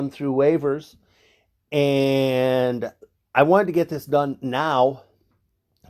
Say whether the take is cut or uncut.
uncut